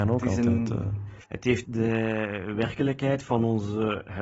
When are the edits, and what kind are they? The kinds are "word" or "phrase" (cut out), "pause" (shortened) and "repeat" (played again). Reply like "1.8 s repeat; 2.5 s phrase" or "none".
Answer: 1.2 s pause; 1.6 s phrase